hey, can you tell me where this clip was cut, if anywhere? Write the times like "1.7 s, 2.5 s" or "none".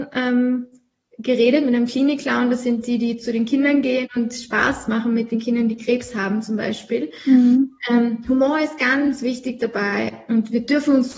none